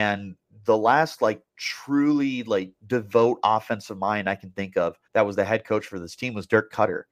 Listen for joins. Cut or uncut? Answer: cut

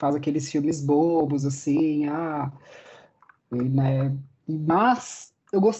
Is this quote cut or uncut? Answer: uncut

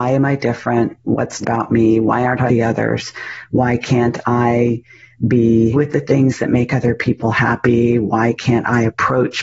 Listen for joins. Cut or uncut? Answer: cut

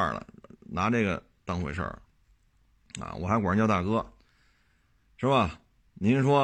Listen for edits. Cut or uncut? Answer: uncut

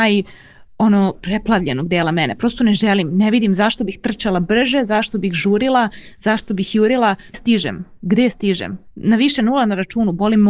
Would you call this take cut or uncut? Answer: cut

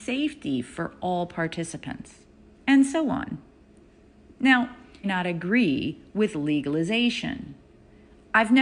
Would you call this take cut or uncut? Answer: cut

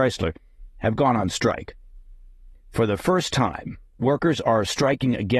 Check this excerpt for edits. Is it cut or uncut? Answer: uncut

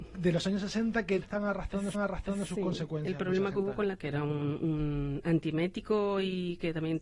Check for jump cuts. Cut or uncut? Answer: cut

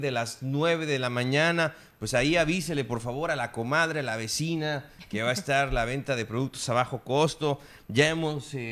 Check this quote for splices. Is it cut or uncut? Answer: uncut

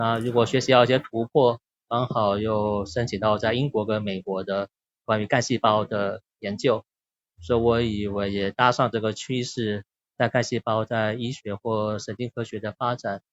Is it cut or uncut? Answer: uncut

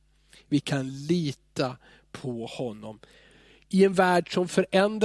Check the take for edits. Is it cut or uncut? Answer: uncut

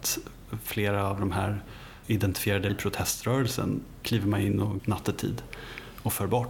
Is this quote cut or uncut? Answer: cut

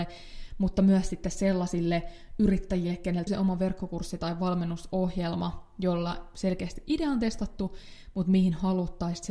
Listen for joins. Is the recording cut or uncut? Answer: cut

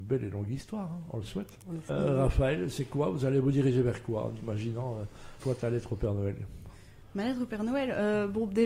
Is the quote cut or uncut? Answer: cut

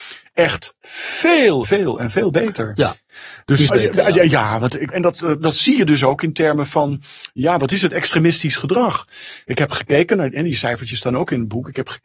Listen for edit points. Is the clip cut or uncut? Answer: cut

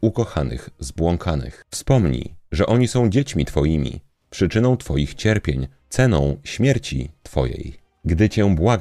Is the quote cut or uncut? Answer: uncut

